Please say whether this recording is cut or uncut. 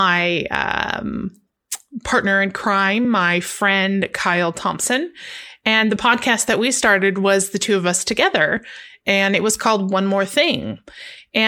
uncut